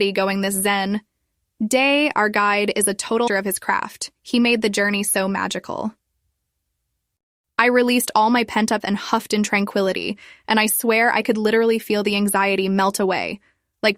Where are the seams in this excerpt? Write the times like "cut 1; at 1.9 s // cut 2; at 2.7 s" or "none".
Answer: cut 1; at 3.3 s // cut 2; at 8.8 s